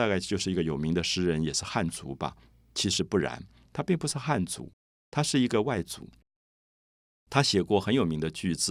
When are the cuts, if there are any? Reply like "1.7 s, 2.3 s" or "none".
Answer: none